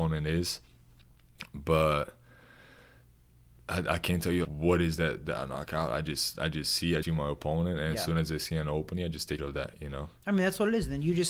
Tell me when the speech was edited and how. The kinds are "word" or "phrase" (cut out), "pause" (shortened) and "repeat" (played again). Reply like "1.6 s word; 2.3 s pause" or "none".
4.4 s word; 7.0 s word; 9.4 s word